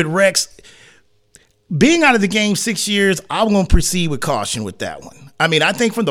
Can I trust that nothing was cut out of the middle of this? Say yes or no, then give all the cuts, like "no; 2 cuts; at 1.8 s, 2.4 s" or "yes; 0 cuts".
yes; 0 cuts